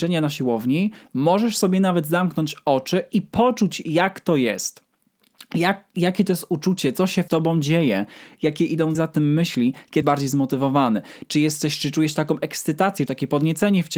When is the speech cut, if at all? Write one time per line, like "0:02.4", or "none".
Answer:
0:07.3
0:08.9
0:10.0
0:13.1